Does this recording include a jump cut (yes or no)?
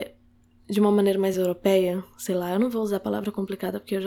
no